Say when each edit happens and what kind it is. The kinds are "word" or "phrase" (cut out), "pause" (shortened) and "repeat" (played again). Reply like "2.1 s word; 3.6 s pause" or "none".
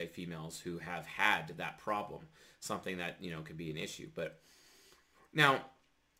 none